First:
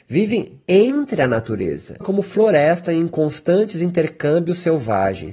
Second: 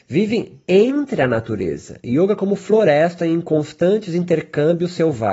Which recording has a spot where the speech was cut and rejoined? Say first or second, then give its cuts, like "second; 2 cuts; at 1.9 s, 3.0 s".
first; 1 cut; at 2.0 s